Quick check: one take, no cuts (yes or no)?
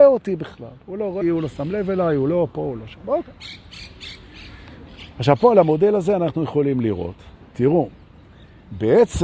no